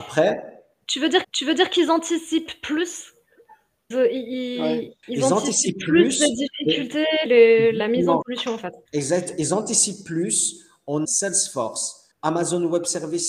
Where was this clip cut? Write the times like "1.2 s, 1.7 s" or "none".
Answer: 1.2 s, 3.9 s, 5.0 s, 7.3 s, 8.2 s, 8.9 s, 11.0 s, 12.1 s